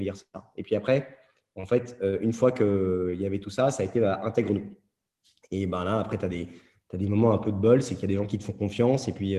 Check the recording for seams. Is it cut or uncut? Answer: uncut